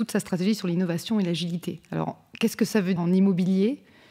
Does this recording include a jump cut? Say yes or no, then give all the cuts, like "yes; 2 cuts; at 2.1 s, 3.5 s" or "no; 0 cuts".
yes; 1 cut; at 3.0 s